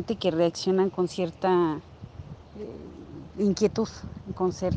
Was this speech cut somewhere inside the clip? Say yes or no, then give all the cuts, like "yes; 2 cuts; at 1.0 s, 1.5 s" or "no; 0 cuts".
no; 0 cuts